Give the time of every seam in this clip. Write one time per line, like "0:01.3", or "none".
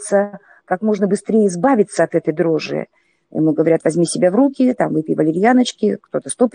none